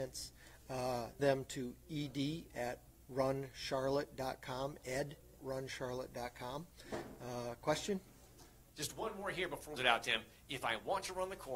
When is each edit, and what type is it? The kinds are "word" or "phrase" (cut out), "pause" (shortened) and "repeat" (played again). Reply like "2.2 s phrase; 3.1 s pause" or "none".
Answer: 1.2 s word; 5.4 s word; 8.7 s pause; 9.8 s phrase